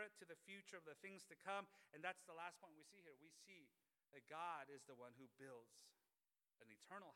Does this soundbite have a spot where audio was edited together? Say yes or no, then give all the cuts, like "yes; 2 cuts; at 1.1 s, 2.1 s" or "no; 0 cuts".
no; 0 cuts